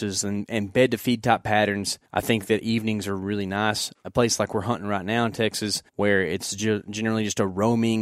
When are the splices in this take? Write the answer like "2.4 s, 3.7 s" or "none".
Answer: 2.1 s, 5.9 s